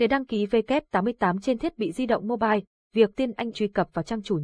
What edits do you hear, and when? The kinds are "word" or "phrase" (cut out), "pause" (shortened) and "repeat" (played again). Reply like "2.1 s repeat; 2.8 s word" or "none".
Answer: 3.1 s word; 3.5 s phrase